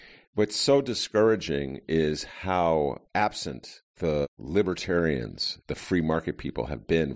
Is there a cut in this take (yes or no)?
yes